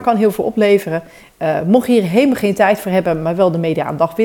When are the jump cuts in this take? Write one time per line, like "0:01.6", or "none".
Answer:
none